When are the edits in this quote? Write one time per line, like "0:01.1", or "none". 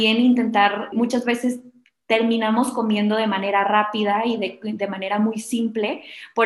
0:00.9